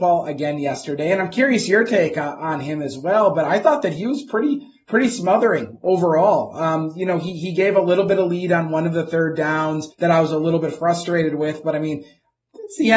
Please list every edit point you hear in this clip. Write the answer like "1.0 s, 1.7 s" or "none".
9.9 s